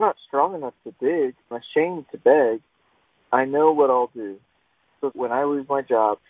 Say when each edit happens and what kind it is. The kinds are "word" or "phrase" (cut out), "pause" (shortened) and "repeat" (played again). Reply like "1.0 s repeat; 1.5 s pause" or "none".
1.5 s phrase; 5.1 s word